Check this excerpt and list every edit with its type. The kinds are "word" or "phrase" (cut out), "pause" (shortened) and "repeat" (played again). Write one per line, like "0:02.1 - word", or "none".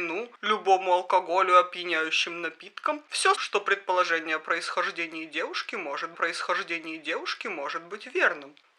0:03.3 - phrase
0:06.1 - repeat